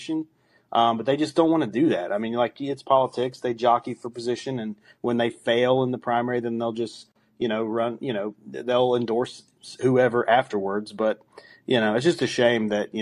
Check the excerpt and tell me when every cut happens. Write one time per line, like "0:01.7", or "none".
none